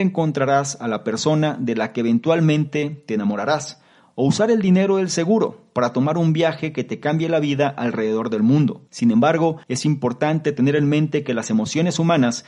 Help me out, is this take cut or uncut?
cut